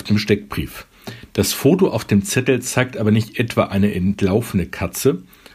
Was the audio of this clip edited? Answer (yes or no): no